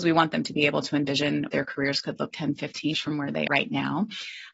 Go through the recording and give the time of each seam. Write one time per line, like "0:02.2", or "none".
0:01.5
0:02.3
0:02.9
0:03.5